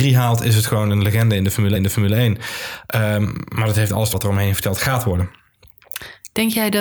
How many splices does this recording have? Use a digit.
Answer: 2